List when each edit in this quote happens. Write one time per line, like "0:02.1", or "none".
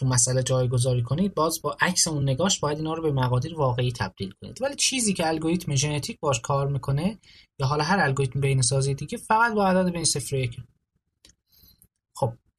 none